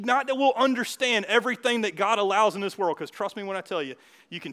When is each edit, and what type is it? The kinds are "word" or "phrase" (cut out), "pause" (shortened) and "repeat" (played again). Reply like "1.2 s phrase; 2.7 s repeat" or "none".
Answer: none